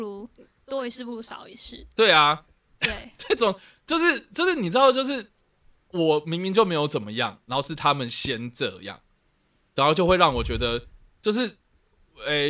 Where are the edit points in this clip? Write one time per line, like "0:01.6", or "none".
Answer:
none